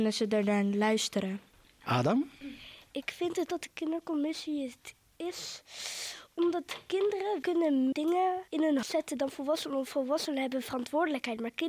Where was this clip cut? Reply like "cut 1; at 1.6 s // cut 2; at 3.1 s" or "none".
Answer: cut 1; at 3.5 s // cut 2; at 7.9 s // cut 3; at 8.5 s // cut 4; at 8.8 s